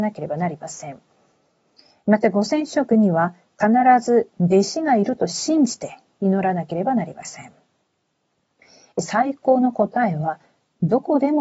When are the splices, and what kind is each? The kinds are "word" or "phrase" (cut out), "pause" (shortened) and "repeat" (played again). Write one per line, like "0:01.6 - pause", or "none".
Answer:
none